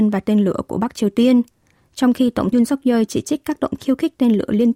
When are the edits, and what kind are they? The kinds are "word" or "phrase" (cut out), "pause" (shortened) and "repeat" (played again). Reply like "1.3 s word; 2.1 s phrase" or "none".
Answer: 2.5 s word; 3.8 s word